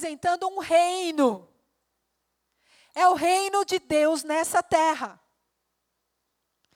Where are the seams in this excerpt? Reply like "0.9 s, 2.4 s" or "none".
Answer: none